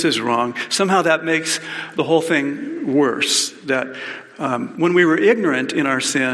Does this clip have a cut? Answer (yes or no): no